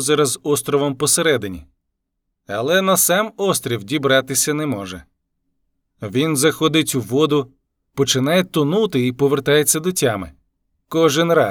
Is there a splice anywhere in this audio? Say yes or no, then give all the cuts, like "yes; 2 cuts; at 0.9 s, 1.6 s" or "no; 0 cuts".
no; 0 cuts